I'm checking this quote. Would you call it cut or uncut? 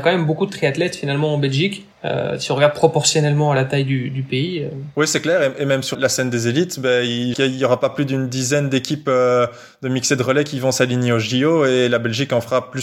cut